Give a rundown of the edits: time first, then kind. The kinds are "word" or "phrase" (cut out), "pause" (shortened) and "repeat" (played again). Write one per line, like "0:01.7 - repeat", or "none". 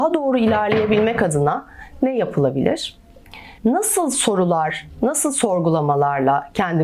0:03.6 - pause